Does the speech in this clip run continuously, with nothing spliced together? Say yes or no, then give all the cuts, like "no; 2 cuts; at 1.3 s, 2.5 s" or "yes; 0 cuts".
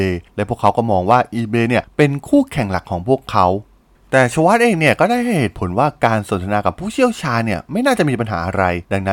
yes; 0 cuts